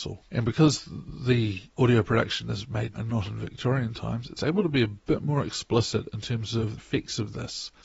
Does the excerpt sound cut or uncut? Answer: cut